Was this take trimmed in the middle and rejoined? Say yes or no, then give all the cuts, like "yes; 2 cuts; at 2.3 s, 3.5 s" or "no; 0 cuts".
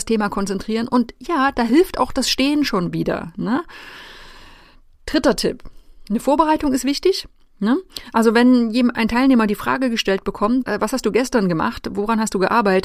yes; 1 cut; at 10.6 s